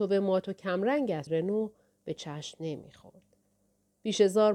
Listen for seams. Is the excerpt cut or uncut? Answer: cut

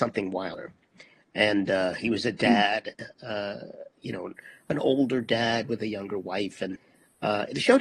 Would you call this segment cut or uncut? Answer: uncut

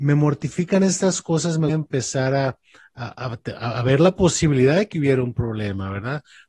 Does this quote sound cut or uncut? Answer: cut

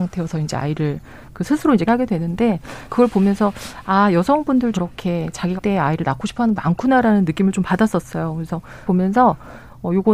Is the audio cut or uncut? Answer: cut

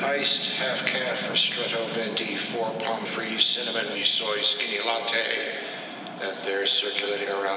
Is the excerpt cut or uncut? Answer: cut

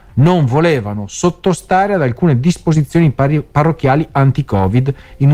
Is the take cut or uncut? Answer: uncut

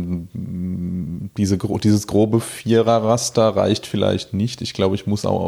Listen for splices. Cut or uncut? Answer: uncut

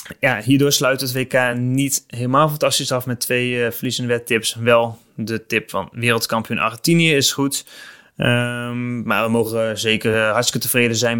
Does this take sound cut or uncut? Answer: uncut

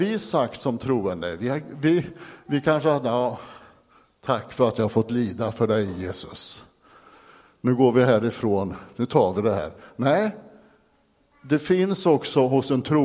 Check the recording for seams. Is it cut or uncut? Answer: uncut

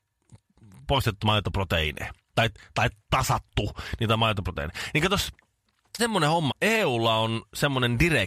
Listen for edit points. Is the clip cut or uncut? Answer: cut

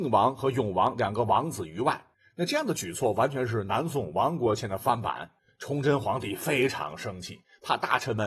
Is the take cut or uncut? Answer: cut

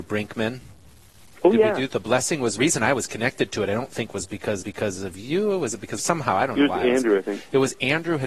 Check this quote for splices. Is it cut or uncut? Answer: cut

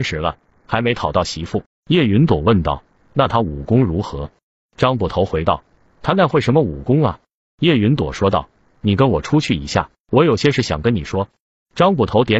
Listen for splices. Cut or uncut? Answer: cut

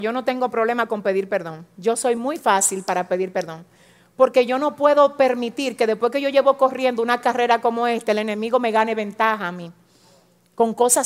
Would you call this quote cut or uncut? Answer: uncut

